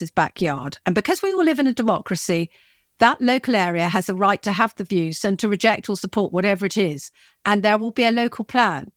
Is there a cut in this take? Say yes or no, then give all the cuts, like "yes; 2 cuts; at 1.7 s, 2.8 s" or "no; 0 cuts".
no; 0 cuts